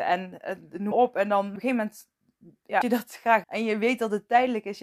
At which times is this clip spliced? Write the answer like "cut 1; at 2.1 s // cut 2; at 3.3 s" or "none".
cut 1; at 0.9 s // cut 2; at 1.6 s // cut 3; at 2.8 s // cut 4; at 3.4 s